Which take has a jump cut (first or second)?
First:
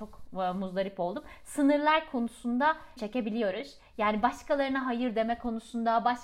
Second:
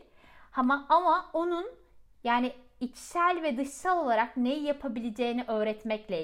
first